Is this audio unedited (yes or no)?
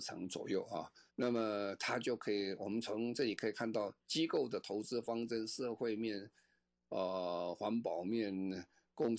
no